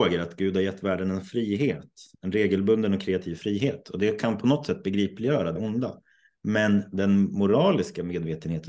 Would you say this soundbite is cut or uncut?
cut